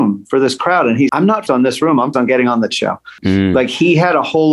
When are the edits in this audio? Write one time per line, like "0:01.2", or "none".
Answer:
0:01.1
0:01.5
0:02.1
0:02.7